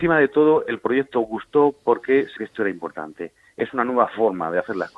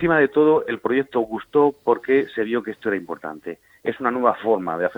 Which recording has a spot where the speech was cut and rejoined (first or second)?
first